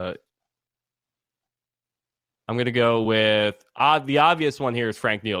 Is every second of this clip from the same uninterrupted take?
yes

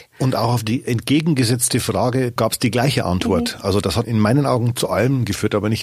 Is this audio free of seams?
no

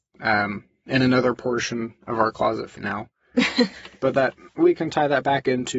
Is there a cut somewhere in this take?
yes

